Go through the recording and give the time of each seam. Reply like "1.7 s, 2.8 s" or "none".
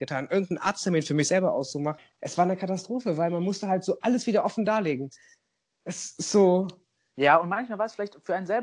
none

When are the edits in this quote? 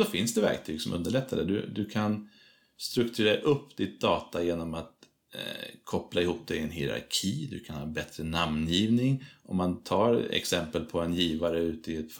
none

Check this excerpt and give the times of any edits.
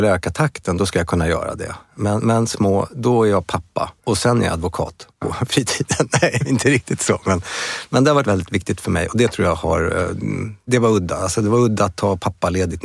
2.5 s, 4.0 s, 5.1 s, 8.2 s, 10.7 s

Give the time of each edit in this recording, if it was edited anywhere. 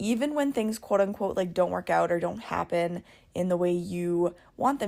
none

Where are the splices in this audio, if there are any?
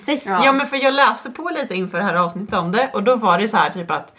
none

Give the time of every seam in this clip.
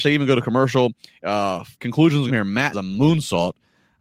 1.7 s, 2.3 s, 2.7 s

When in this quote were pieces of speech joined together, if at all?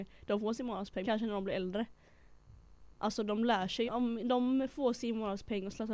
1.0 s, 3.9 s

